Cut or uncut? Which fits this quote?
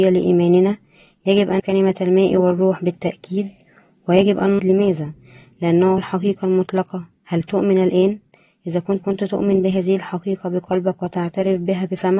cut